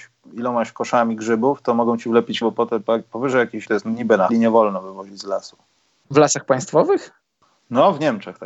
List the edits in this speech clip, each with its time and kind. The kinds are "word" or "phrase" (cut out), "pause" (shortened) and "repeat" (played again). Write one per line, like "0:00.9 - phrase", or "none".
0:02.4 - word
0:03.7 - word
0:04.3 - word